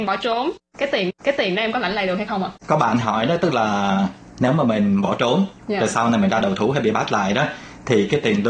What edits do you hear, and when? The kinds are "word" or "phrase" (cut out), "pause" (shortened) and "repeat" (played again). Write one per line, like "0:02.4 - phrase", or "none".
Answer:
0:01.1 - repeat
0:02.6 - pause